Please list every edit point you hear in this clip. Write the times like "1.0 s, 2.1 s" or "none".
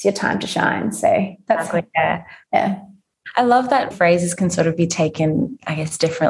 3.9 s

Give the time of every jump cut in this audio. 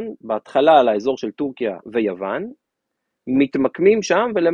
1.8 s

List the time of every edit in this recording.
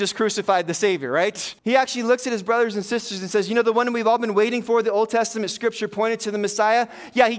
1.6 s

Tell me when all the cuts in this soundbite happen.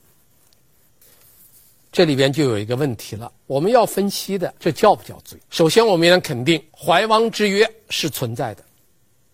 4.6 s, 5.4 s, 6.7 s

